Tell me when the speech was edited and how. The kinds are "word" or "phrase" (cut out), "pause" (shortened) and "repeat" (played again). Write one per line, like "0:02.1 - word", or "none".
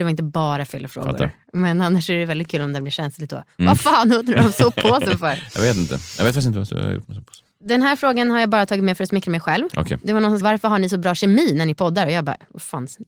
0:10.4 - word